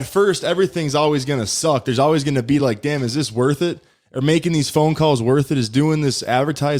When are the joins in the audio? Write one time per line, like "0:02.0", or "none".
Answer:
none